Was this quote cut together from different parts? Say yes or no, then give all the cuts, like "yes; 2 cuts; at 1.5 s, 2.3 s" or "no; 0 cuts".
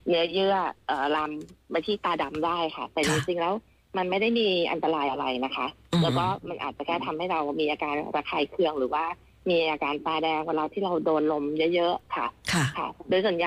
no; 0 cuts